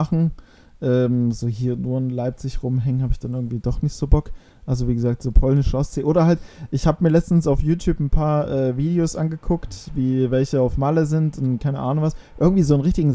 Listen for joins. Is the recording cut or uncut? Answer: uncut